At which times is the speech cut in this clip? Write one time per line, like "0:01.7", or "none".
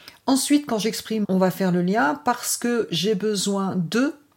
0:01.2